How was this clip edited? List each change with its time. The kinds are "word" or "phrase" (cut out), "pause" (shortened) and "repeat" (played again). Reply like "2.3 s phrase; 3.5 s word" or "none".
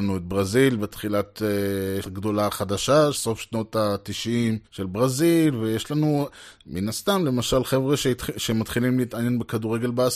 2.0 s phrase; 3.1 s word; 4.6 s pause